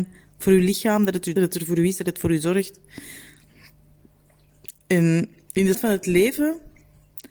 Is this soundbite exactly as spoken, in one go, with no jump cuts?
no; 2 cuts; at 1.4 s, 5.7 s

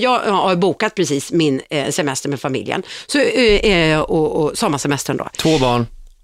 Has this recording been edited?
no; 0 cuts

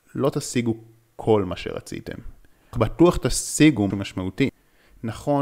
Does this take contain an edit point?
yes; 2 cuts; at 2.7 s, 3.9 s

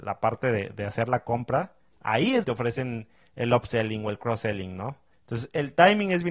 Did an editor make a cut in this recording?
yes; 1 cut; at 2.4 s

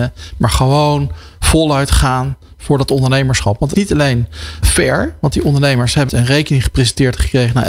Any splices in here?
yes; 3 cuts; at 3.7 s, 4.6 s, 6.1 s

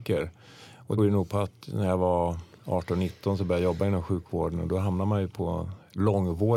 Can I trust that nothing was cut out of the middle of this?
no; 1 cut; at 1.0 s

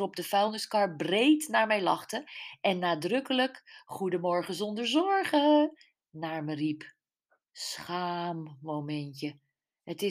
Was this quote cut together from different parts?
no; 0 cuts

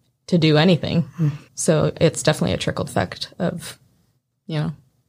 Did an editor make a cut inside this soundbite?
yes; 2 cuts; at 1.5 s, 2.9 s

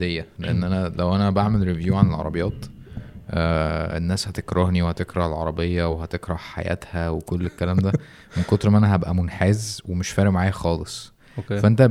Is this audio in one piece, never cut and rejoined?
yes; 0 cuts

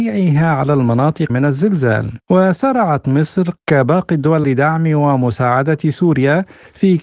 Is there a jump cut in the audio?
yes; 4 cuts; at 1.3 s, 2.2 s, 3.6 s, 4.4 s

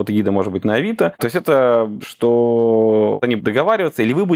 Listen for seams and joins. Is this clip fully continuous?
no; 2 cuts; at 2.0 s, 3.4 s

